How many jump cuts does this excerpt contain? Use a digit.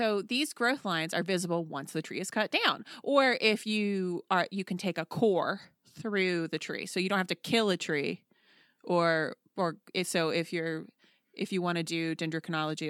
0